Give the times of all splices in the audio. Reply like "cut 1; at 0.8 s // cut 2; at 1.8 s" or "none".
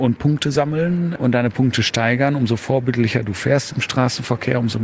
none